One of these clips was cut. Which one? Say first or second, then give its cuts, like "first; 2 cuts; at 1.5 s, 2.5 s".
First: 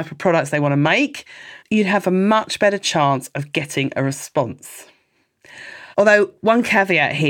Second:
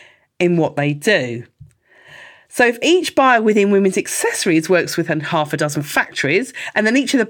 first; 2 cuts; at 1.6 s, 5.9 s